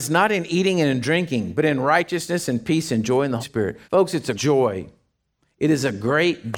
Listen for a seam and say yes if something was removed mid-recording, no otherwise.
yes